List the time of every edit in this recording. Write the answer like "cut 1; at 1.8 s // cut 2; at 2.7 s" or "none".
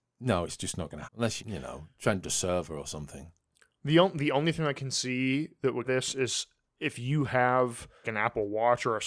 cut 1; at 1.0 s // cut 2; at 1.4 s // cut 3; at 2.2 s // cut 4; at 5.8 s // cut 5; at 8.0 s